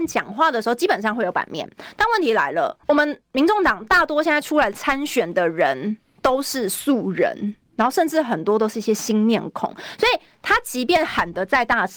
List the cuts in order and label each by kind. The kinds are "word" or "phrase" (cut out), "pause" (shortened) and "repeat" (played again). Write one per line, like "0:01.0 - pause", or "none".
0:02.8 - pause